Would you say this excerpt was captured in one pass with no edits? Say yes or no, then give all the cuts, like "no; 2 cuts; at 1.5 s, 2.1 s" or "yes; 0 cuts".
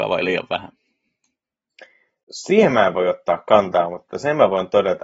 yes; 0 cuts